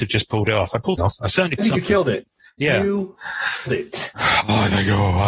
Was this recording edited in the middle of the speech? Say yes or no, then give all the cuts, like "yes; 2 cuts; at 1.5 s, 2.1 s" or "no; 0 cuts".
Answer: yes; 3 cuts; at 1.0 s, 1.6 s, 3.7 s